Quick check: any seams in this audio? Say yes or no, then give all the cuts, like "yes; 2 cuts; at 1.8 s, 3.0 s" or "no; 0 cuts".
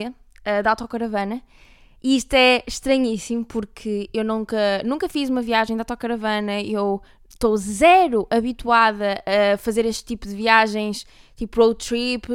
no; 0 cuts